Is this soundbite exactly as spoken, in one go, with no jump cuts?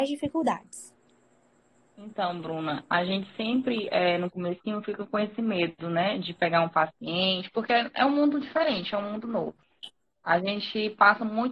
yes; 0 cuts

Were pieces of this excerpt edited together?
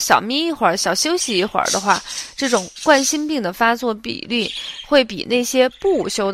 no; 0 cuts

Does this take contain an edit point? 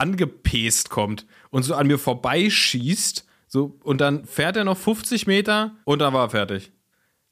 yes; 1 cut; at 5.8 s

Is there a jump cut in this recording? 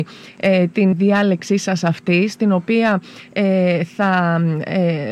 yes; 1 cut; at 0.9 s

